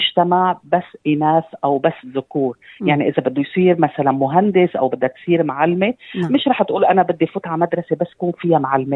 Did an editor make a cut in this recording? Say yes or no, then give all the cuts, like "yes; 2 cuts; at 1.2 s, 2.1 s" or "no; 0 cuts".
no; 0 cuts